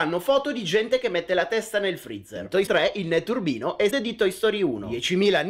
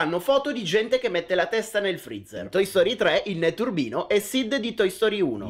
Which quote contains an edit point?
first; 2 cuts; at 2.7 s, 3.9 s

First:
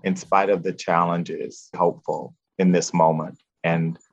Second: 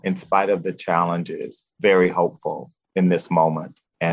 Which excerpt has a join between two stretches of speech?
first; 1 cut; at 1.7 s

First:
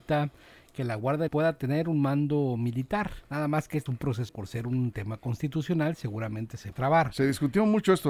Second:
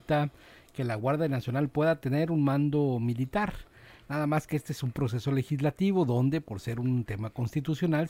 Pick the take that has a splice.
first; 5 cuts; at 1.3 s, 3.2 s, 3.9 s, 4.3 s, 6.7 s

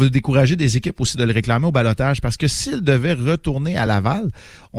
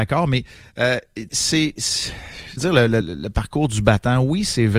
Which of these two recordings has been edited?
second; 3 cuts; at 1.3 s, 2.6 s, 3.0 s

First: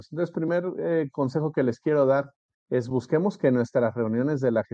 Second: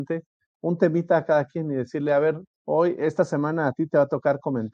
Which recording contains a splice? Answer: second; 1 cut; at 2.5 s

